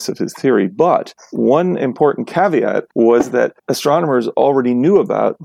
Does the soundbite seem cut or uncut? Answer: cut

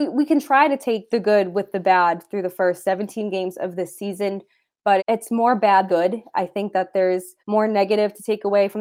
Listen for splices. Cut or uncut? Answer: cut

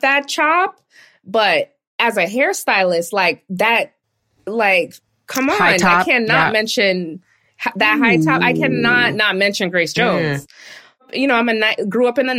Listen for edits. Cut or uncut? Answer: uncut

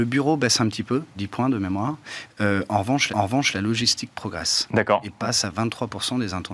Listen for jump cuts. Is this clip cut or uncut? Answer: cut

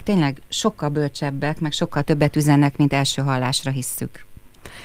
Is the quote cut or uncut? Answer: uncut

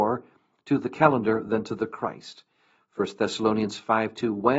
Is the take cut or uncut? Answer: uncut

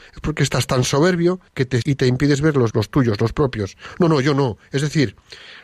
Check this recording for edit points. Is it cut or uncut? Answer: cut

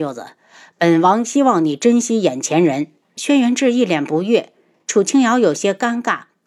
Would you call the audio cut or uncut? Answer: uncut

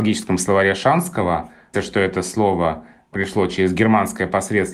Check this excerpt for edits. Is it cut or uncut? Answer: cut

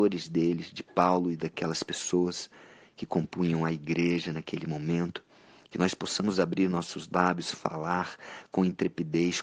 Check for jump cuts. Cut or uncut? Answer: uncut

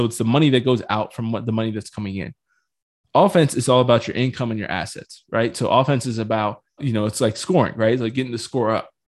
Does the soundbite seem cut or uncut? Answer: cut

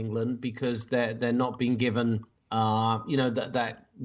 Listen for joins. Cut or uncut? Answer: uncut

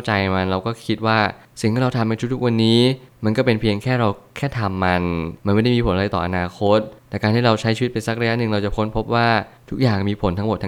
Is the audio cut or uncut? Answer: cut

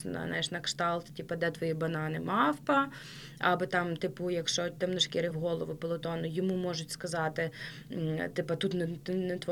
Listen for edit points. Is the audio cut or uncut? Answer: cut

